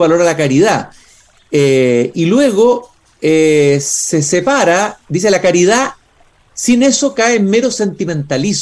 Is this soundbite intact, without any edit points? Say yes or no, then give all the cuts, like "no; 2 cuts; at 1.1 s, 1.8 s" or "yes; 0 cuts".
yes; 0 cuts